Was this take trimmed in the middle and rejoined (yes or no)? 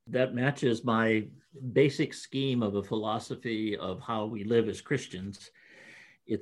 no